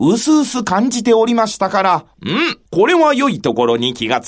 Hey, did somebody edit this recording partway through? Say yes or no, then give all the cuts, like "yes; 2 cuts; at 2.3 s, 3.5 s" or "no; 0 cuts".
yes; 2 cuts; at 2.1 s, 2.7 s